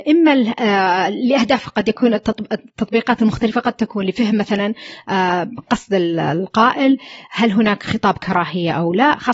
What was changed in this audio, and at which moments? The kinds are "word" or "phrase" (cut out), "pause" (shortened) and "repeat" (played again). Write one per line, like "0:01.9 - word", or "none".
none